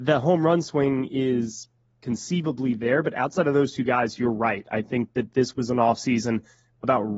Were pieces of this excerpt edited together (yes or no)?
no